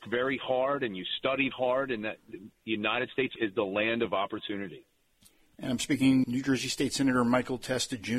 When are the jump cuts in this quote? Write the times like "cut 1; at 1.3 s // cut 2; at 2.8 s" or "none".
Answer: cut 1; at 1.5 s // cut 2; at 3.4 s // cut 3; at 6.2 s